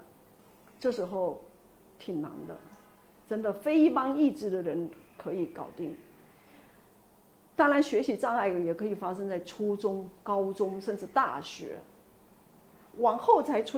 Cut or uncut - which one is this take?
uncut